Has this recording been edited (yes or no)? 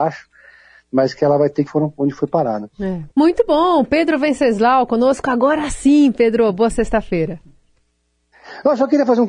yes